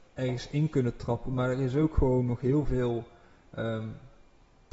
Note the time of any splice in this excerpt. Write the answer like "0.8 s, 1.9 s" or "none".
none